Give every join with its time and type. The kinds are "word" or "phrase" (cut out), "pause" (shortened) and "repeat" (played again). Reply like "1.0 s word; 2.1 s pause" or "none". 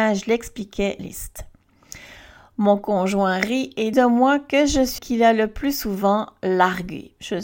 1.0 s phrase; 3.9 s word; 5.0 s word